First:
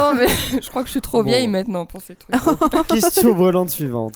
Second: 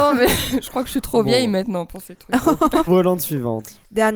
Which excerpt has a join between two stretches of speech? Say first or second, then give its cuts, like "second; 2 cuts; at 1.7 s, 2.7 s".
second; 1 cut; at 2.9 s